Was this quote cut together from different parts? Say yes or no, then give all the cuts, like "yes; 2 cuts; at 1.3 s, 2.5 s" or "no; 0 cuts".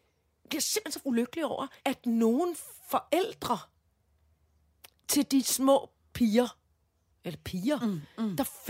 yes; 2 cuts; at 1.0 s, 1.8 s